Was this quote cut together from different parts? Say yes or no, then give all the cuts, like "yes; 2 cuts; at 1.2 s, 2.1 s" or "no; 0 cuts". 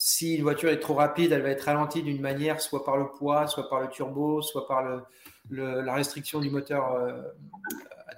no; 0 cuts